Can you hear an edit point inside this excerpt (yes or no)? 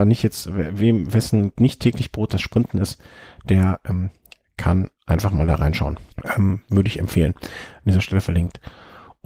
yes